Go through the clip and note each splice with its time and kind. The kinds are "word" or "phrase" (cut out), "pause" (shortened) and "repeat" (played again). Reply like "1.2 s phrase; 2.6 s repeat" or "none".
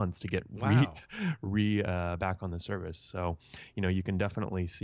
none